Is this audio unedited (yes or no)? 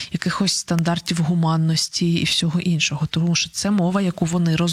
yes